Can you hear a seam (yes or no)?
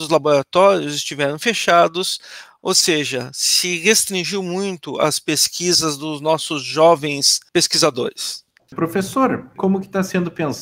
no